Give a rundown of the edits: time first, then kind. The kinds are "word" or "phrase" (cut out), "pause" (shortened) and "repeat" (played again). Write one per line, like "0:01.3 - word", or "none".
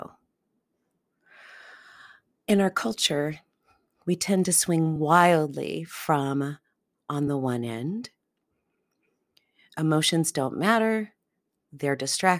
none